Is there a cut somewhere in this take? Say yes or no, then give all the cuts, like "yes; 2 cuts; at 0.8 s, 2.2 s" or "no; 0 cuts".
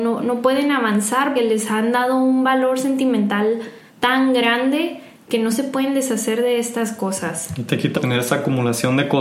yes; 3 cuts; at 1.4 s, 3.9 s, 7.9 s